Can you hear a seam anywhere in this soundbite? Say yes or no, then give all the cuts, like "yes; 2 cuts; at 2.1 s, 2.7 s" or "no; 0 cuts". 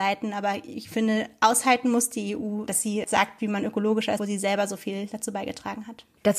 yes; 2 cuts; at 3.0 s, 4.2 s